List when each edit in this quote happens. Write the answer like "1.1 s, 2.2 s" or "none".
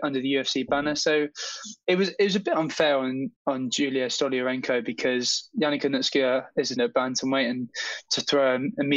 3.4 s, 6.8 s

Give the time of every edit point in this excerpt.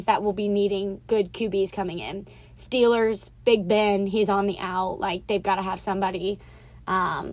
none

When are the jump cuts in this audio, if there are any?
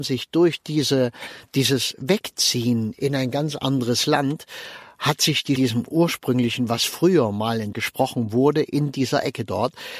5.6 s, 7.7 s

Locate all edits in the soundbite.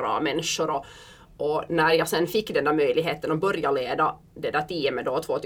none

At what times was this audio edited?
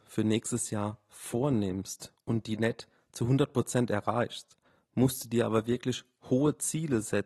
4.7 s

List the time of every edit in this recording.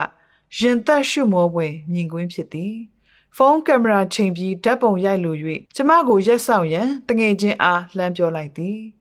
5.7 s

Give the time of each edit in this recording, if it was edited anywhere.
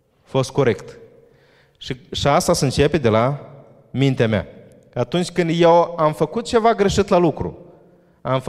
none

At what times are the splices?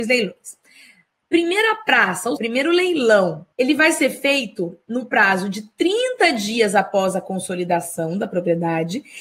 2.4 s, 3.5 s

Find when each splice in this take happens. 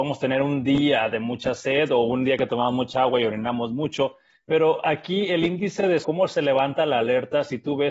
6.0 s

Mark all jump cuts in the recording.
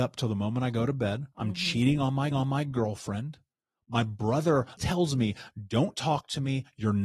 1.3 s, 2.3 s, 4.8 s

